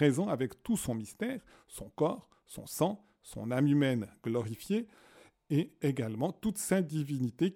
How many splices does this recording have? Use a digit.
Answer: 0